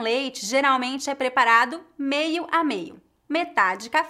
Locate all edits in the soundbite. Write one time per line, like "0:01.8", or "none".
none